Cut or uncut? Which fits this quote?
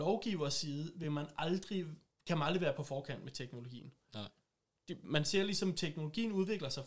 uncut